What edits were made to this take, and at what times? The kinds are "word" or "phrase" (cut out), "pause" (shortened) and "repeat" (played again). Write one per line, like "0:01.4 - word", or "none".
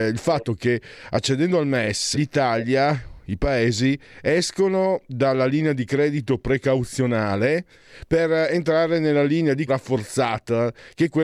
0:02.1 - word
0:09.7 - word